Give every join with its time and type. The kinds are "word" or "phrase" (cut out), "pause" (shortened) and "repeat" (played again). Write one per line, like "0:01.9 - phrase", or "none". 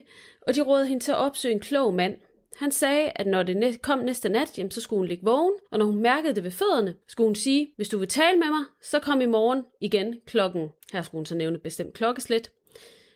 0:05.7 - pause
0:07.0 - pause
0:07.7 - pause
0:10.8 - pause